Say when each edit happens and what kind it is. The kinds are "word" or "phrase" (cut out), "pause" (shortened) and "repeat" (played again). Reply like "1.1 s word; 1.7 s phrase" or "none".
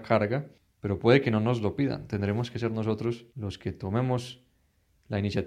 3.3 s pause